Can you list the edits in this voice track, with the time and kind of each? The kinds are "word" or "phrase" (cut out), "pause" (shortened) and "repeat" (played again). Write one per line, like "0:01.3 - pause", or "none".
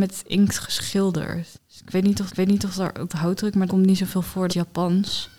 0:01.6 - pause
0:02.3 - repeat
0:03.1 - word
0:03.7 - word
0:04.5 - phrase